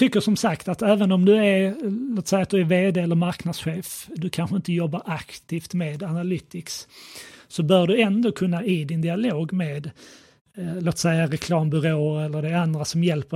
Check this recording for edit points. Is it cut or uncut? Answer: uncut